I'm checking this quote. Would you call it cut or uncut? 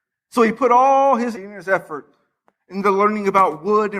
cut